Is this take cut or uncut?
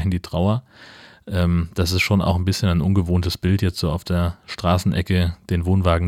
uncut